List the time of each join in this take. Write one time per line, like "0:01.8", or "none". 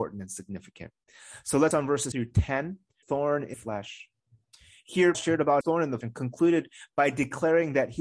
0:01.7
0:02.1
0:03.0
0:03.5
0:05.1
0:05.6
0:06.0